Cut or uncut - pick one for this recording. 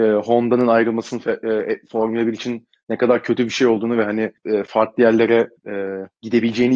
cut